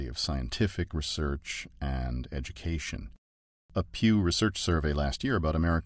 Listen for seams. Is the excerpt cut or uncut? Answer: uncut